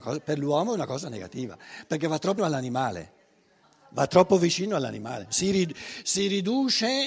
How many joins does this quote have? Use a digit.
2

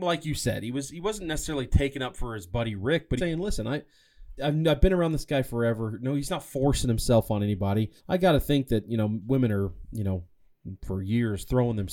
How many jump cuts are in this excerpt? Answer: 3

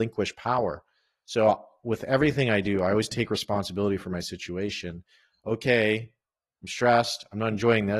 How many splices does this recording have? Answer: 0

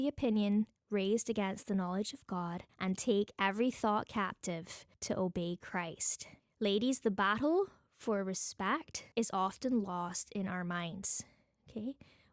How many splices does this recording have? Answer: 4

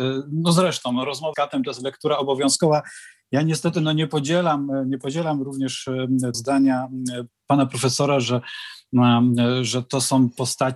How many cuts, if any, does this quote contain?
2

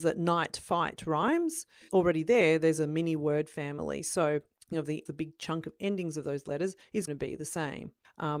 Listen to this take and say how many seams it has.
3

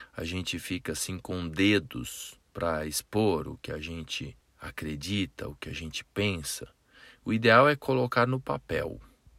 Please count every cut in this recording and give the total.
2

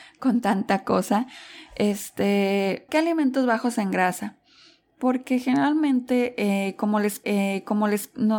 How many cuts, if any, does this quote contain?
2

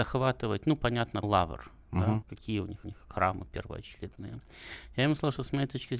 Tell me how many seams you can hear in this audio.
3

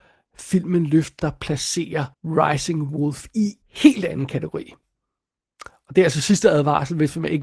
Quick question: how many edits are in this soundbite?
3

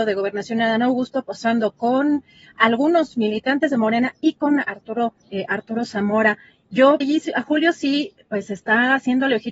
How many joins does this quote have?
2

